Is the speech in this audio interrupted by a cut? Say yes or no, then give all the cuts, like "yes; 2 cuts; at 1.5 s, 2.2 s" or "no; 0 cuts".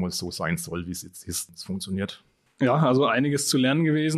no; 0 cuts